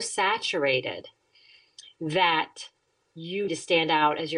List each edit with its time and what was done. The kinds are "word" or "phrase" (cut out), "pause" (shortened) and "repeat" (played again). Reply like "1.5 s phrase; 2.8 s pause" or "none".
3.5 s word